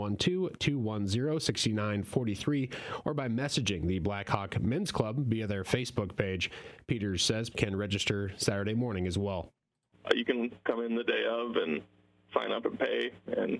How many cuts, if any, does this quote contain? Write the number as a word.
one